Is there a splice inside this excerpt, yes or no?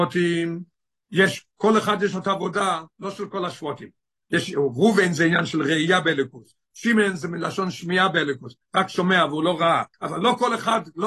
yes